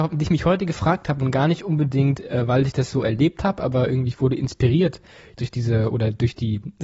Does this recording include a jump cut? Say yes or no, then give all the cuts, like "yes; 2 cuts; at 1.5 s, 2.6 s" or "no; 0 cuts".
no; 0 cuts